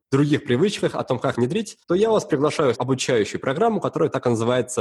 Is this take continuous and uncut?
no; 3 cuts; at 1.3 s, 1.8 s, 2.7 s

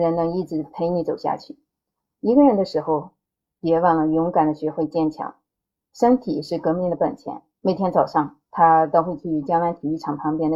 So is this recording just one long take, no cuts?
no; 1 cut; at 8.4 s

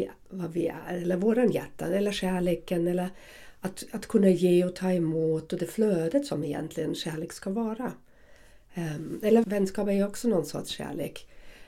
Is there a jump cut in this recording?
yes; 1 cut; at 9.4 s

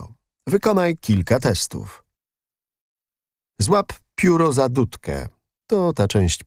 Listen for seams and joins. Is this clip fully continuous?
yes; 0 cuts

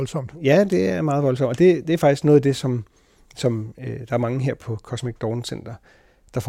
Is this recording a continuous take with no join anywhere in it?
yes; 0 cuts

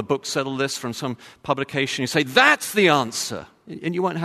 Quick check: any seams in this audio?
no; 0 cuts

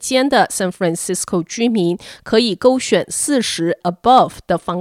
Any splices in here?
yes; 1 cut; at 3.8 s

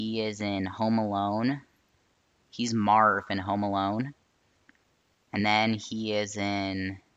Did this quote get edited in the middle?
no; 0 cuts

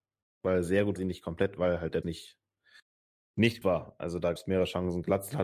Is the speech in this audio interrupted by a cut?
yes; 4 cuts; at 1.0 s, 2.0 s, 3.6 s, 4.4 s

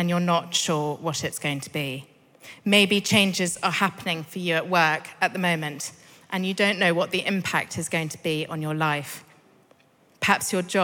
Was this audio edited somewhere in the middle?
no; 0 cuts

